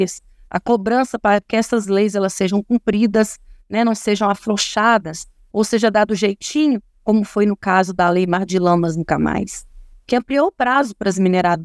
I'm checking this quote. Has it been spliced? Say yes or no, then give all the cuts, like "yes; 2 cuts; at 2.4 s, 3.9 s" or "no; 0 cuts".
no; 0 cuts